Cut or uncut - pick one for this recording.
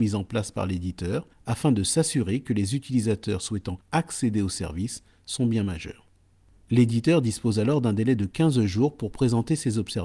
uncut